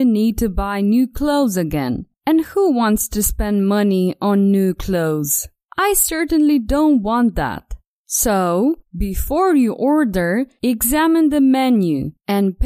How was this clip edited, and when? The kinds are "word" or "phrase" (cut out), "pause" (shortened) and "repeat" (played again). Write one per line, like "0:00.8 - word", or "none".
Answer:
none

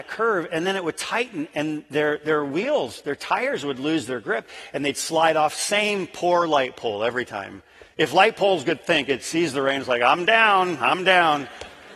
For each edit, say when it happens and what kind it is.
none

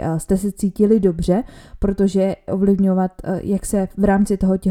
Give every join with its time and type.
0:02.5 - phrase

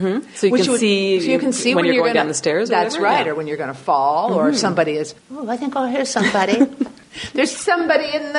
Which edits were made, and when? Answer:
0:05.2 - pause

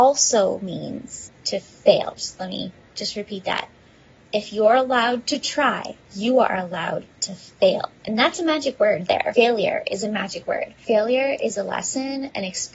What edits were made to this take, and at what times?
0:01.3 - phrase

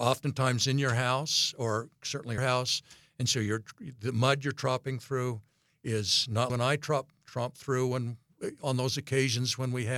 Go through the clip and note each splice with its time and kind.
0:02.4 - phrase
0:06.5 - phrase

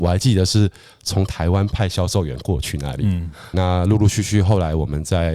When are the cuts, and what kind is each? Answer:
0:03.5 - word

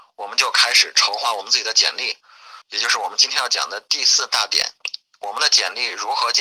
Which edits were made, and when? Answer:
0:02.6 - pause

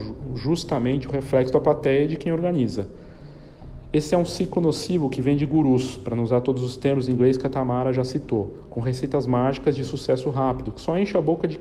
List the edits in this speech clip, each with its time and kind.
none

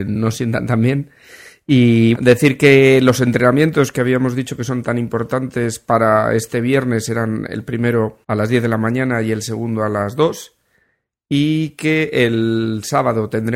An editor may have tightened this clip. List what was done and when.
0:02.1 - word
0:08.2 - pause

